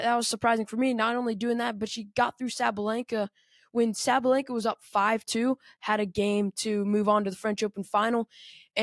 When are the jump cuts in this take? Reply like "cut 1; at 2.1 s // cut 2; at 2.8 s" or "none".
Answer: none